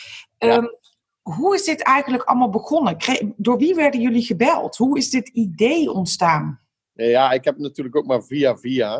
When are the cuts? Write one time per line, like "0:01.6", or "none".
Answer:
none